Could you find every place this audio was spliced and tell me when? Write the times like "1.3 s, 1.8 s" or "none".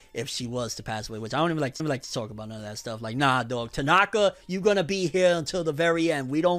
1.8 s